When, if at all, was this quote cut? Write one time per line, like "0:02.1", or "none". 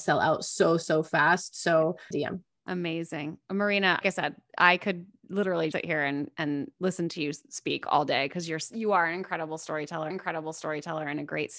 0:02.1
0:04.0
0:05.7
0:10.1